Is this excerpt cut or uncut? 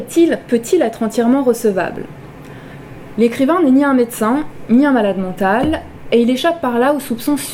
uncut